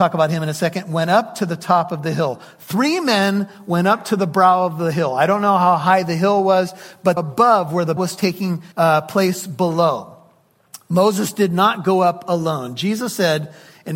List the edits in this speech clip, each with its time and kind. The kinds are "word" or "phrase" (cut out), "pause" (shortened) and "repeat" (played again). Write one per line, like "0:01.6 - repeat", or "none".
0:07.2 - phrase
0:08.0 - word
0:08.7 - pause